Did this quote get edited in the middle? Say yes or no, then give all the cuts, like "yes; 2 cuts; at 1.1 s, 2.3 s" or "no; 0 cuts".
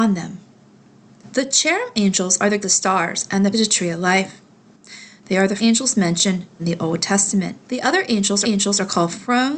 yes; 6 cuts; at 2.6 s, 3.5 s, 5.6 s, 6.6 s, 7.6 s, 8.4 s